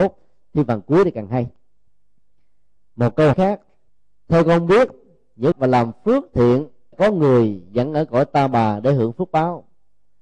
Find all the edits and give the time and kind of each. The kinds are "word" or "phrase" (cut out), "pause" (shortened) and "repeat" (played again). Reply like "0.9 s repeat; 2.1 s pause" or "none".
1.9 s pause; 3.3 s word; 3.9 s pause; 5.5 s phrase; 6.9 s word